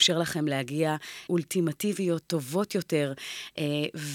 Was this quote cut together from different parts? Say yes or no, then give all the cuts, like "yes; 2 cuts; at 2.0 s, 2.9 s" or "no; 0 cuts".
yes; 1 cut; at 1.3 s